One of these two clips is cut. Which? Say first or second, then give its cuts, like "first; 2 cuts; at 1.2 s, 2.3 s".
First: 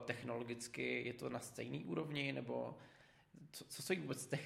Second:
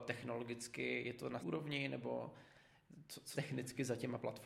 second; 2 cuts; at 1.4 s, 3.3 s